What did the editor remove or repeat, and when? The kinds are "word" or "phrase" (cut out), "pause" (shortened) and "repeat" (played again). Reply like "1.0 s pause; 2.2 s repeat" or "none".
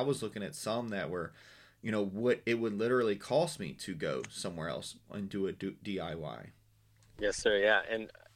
none

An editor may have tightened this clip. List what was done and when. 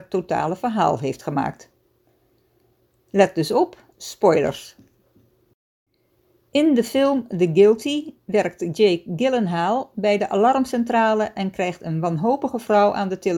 3.9 s pause

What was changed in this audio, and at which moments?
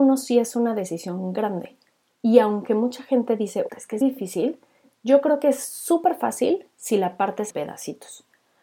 3.7 s word; 4.0 s word; 7.5 s word

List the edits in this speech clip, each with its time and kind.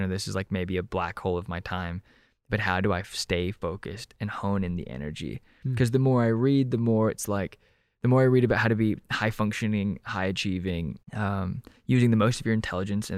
11.0 s pause

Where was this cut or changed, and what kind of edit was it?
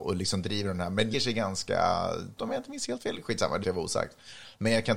1.1 s word; 2.4 s word; 3.6 s word

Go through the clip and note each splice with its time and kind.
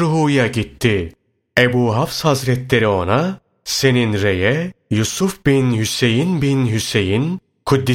none

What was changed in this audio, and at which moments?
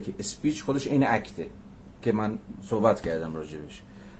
none

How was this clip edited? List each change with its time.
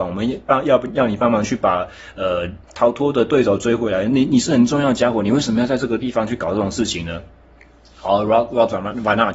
2.6 s pause

